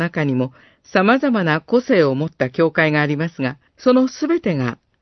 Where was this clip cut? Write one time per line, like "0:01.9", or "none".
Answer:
0:03.7

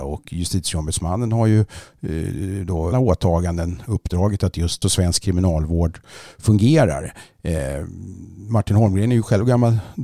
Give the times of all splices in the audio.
0:02.9
0:04.8

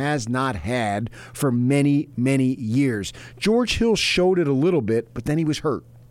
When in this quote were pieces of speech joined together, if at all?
none

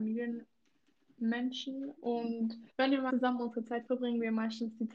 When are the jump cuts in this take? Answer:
0:02.7
0:03.1
0:03.9

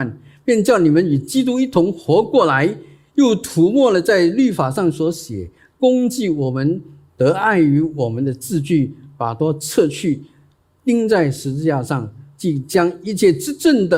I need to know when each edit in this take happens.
none

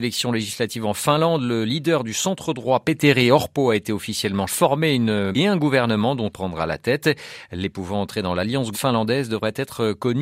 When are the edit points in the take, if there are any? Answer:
0:04.5
0:05.3
0:06.3
0:07.7
0:08.7

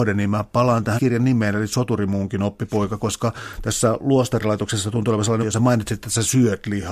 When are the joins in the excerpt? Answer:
0:01.0
0:05.4

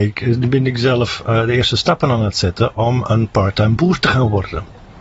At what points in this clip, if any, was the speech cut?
none

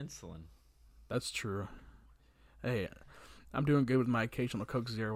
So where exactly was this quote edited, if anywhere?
none

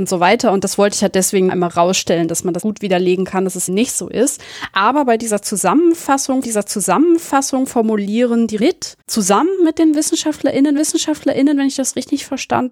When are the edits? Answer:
0:01.5
0:02.6
0:03.7
0:06.4
0:08.6
0:09.0
0:10.8

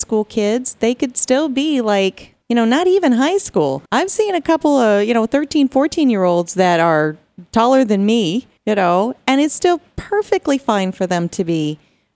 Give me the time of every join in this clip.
0:02.4
0:03.8
0:08.6

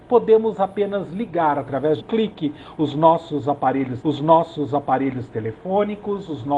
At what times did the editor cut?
0:02.0
0:04.0

